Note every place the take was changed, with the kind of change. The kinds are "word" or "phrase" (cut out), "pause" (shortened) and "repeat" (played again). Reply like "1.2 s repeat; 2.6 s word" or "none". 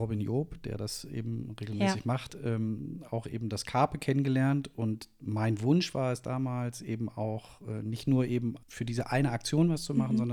8.6 s pause